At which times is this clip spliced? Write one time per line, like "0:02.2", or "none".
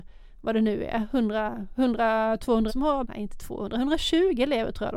0:02.7
0:03.0

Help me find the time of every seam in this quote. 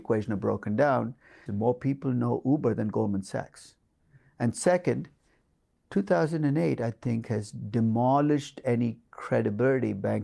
0:01.5

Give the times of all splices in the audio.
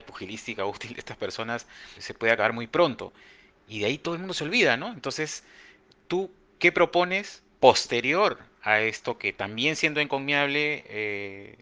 0:02.0
0:07.5

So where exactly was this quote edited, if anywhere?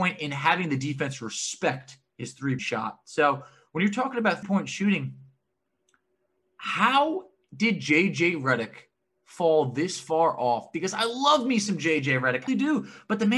0:02.6
0:04.4
0:12.5

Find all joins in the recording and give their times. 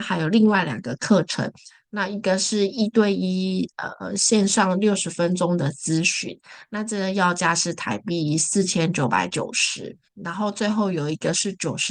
0:10.1

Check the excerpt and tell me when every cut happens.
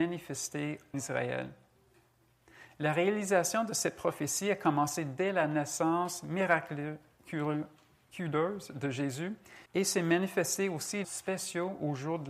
0:00.9
0:09.7
0:11.0

